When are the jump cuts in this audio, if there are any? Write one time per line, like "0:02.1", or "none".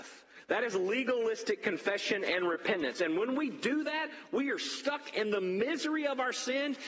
none